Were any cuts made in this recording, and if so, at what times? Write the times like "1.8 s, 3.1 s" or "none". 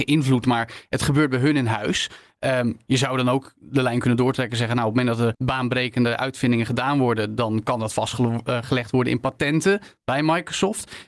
5.3 s